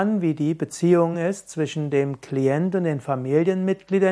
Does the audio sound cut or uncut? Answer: uncut